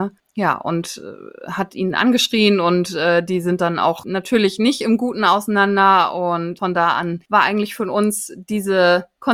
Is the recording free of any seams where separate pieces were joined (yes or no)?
yes